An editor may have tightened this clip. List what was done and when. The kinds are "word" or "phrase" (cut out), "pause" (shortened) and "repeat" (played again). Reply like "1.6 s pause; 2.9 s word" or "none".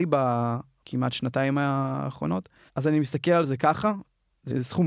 2.7 s pause